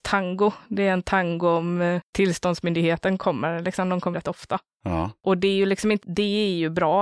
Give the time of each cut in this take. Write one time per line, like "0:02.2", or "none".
0:02.1
0:04.1
0:06.0